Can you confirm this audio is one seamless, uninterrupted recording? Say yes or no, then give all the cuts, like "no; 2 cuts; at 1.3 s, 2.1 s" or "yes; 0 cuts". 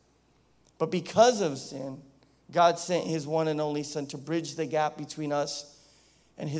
yes; 0 cuts